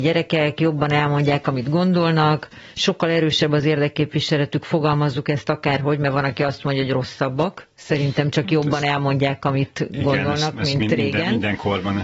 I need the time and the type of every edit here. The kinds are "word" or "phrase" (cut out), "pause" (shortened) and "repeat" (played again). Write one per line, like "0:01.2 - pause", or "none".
0:02.7 - pause